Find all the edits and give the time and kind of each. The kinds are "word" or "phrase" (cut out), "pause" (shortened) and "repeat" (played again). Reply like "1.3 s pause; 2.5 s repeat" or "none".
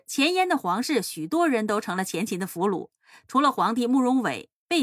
none